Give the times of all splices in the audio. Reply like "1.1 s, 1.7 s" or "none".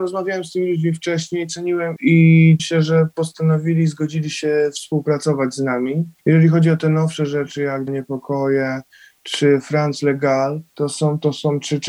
2.0 s, 2.6 s, 6.2 s, 7.9 s, 10.7 s